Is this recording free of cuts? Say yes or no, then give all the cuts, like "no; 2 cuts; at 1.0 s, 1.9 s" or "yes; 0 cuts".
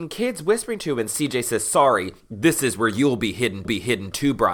no; 1 cut; at 3.6 s